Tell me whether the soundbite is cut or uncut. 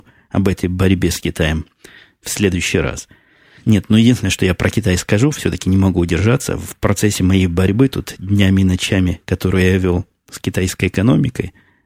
uncut